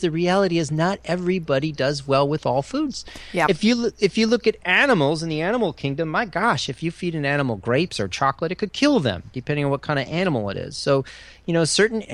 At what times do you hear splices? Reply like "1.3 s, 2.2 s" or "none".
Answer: none

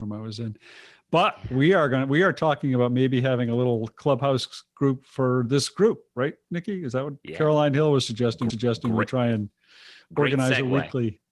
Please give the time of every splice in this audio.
8.5 s

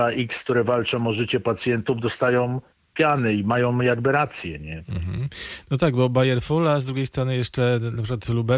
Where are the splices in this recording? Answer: none

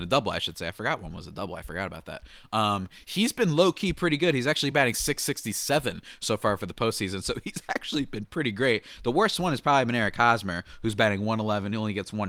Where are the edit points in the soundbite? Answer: none

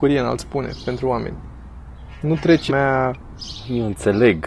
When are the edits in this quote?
2.7 s

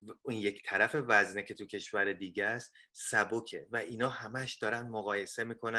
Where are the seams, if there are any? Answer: none

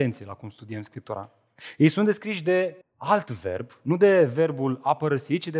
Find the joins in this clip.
2.8 s

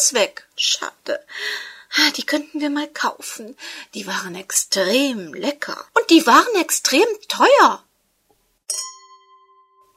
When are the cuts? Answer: 5.9 s

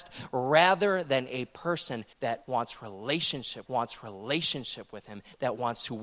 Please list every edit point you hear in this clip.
2.1 s, 3.7 s

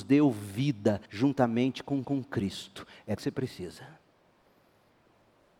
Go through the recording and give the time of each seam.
1.1 s, 2.0 s, 3.2 s

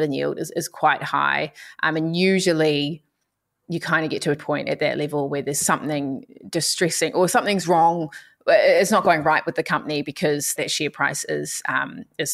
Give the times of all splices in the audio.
4.4 s, 10.6 s

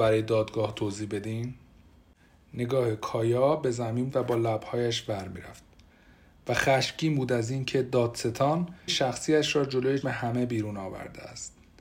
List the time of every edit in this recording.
4.1 s, 8.9 s, 10.0 s

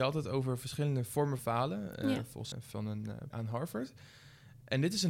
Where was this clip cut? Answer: 1.4 s, 2.5 s, 3.3 s

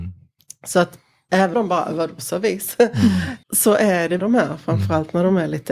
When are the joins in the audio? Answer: 1.5 s, 3.4 s, 4.2 s

